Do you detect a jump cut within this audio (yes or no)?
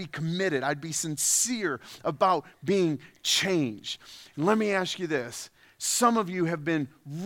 no